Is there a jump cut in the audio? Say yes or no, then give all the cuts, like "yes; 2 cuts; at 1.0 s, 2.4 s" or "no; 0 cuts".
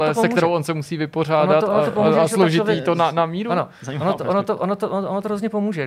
no; 0 cuts